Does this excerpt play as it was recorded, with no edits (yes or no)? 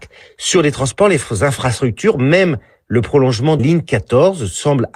no